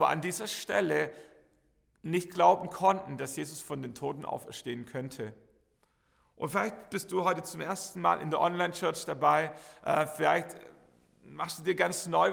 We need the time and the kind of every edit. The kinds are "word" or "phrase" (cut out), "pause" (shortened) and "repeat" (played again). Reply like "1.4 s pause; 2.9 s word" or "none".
none